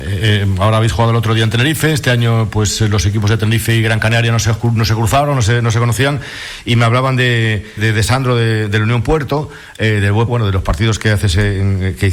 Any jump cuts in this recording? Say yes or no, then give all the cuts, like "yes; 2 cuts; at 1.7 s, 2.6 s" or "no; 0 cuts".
yes; 2 cuts; at 7.8 s, 10.3 s